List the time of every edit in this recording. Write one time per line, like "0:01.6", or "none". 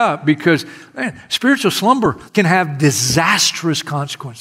0:02.3